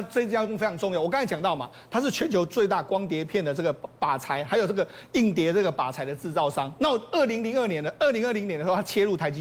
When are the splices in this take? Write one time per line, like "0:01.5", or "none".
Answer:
none